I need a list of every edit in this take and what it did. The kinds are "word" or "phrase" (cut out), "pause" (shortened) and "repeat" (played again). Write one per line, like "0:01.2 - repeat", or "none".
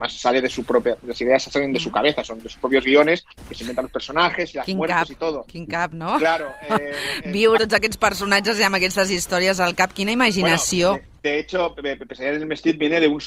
0:07.6 - word
0:11.2 - pause